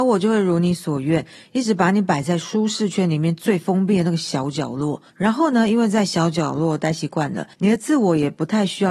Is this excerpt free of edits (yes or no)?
no